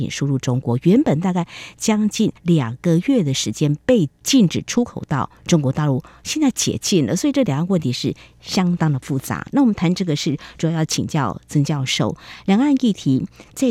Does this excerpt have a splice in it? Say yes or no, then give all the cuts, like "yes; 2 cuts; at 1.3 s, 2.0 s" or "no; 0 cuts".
yes; 1 cut; at 2.4 s